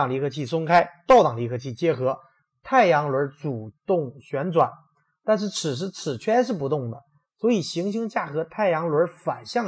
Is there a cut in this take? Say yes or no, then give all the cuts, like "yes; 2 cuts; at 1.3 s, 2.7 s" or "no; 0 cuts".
no; 0 cuts